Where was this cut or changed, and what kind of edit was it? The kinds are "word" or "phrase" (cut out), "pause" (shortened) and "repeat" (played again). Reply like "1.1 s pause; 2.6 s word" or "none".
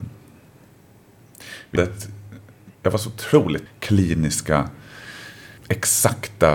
1.8 s word; 2.7 s pause; 3.7 s phrase